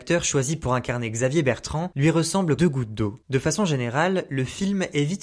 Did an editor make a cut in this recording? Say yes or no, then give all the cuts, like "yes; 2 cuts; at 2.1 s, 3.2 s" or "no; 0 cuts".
yes; 1 cut; at 2.6 s